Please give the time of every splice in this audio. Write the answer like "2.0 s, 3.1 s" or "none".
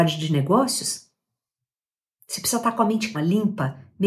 3.1 s